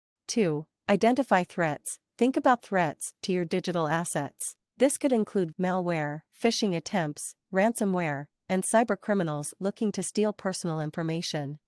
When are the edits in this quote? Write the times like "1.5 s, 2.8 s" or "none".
2.6 s, 4.6 s, 5.5 s